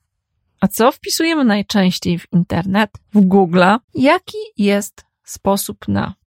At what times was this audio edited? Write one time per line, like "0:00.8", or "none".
0:03.0
0:03.8